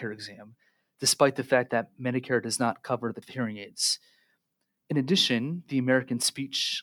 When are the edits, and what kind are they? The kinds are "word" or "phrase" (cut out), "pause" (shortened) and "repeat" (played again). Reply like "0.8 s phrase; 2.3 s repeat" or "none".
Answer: 3.2 s word